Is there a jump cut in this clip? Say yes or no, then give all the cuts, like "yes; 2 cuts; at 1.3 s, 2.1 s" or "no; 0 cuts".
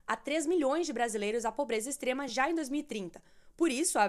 no; 0 cuts